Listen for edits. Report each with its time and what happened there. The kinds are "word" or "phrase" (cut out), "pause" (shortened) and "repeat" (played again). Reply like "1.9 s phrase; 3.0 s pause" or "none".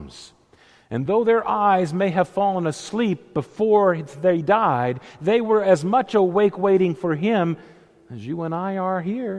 none